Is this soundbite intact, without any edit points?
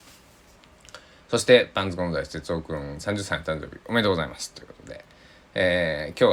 yes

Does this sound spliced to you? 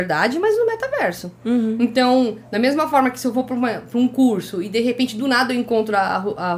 no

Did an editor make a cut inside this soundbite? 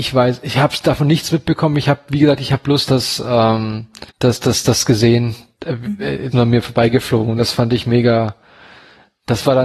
yes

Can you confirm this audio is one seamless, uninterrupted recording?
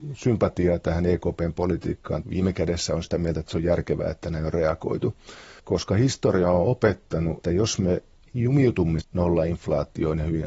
no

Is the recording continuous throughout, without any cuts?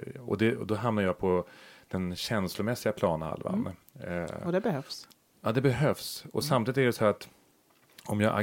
yes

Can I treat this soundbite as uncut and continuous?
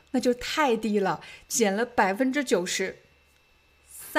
yes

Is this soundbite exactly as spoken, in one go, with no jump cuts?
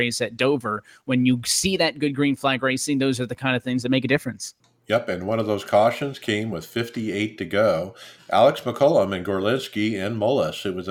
yes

